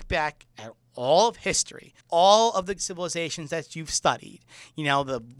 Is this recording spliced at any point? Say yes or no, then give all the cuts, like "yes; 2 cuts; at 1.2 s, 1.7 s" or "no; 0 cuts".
yes; 2 cuts; at 2.0 s, 2.8 s